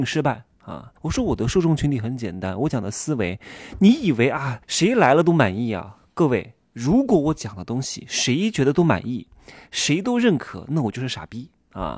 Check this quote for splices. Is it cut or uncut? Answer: cut